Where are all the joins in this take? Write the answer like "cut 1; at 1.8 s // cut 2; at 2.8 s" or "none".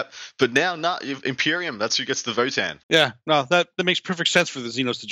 cut 1; at 1.9 s // cut 2; at 2.8 s